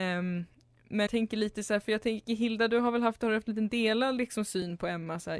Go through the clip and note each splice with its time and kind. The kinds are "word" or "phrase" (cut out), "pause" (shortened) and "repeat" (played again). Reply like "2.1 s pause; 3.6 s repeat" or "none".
1.1 s word